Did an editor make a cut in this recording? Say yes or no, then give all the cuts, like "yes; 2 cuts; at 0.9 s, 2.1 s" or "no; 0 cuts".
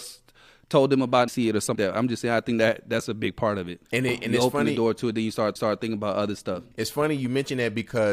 yes; 5 cuts; at 1.3 s, 1.7 s, 3.8 s, 5.6 s, 6.7 s